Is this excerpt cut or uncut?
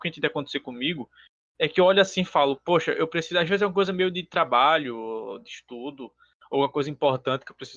uncut